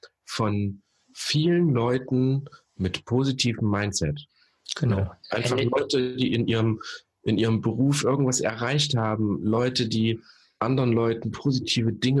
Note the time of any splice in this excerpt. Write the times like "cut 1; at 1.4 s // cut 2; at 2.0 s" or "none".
none